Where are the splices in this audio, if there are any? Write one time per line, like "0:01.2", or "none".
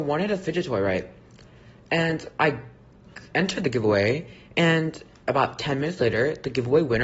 0:02.3